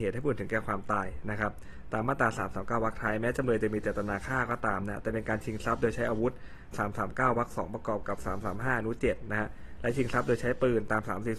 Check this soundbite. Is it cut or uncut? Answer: cut